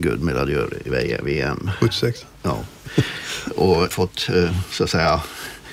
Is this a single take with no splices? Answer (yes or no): no